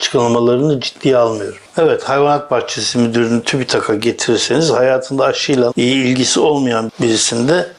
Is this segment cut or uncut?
cut